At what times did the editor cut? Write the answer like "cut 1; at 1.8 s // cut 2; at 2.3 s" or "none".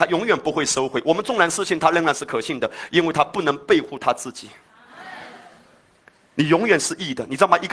none